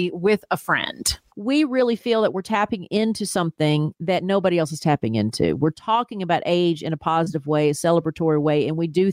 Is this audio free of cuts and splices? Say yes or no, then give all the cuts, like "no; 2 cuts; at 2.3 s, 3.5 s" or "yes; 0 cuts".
yes; 0 cuts